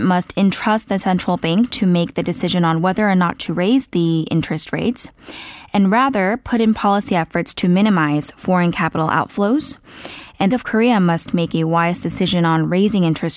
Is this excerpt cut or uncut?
cut